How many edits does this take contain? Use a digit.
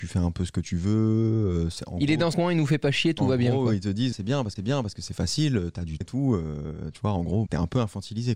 5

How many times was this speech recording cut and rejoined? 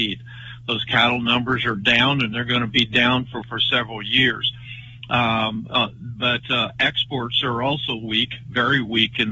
1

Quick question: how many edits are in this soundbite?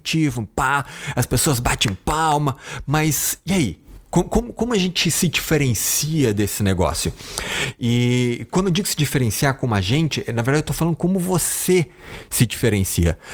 0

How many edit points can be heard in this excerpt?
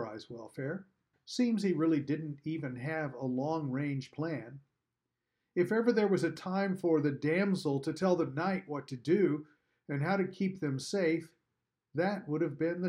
1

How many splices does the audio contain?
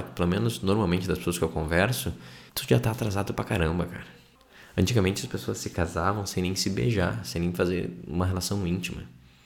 2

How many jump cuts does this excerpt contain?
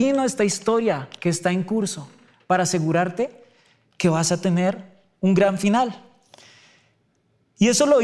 0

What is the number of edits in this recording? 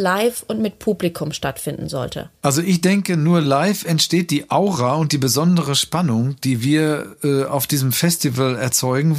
0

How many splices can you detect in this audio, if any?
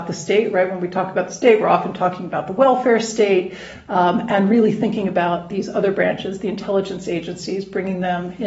0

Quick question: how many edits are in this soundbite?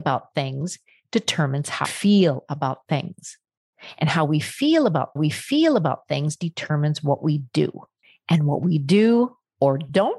2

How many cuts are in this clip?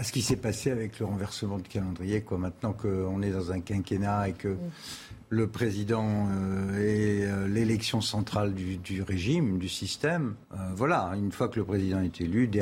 1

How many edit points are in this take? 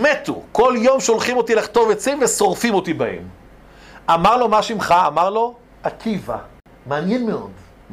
0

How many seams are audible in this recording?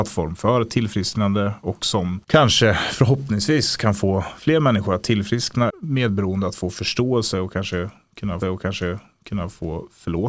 3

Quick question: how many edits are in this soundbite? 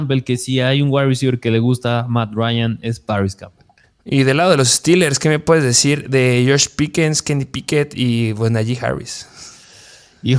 1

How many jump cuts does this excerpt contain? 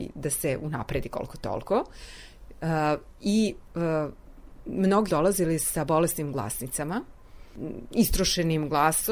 1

